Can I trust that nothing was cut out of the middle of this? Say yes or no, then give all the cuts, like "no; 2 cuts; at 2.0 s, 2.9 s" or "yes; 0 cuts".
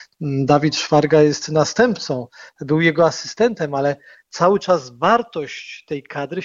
yes; 0 cuts